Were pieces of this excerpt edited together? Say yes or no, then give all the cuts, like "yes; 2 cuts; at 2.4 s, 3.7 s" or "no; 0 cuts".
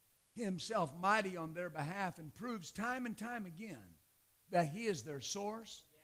no; 0 cuts